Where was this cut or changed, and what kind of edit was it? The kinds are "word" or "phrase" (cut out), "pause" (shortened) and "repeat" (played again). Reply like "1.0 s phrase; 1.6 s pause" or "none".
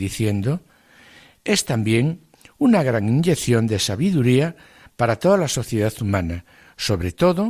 none